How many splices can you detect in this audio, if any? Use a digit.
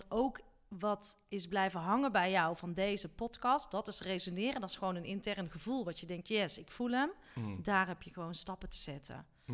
0